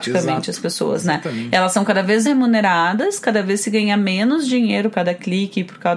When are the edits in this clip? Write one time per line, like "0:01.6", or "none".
0:02.2
0:04.9